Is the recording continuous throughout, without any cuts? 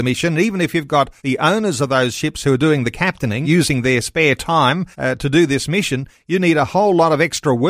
no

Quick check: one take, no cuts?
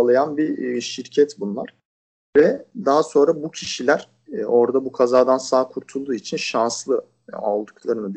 yes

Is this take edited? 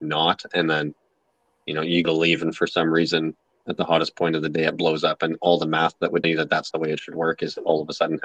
yes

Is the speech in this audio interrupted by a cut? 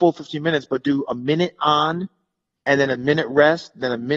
no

